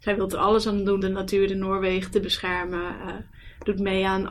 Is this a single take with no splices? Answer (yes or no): no